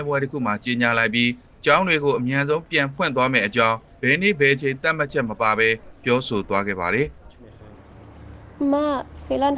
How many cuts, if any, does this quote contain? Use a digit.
0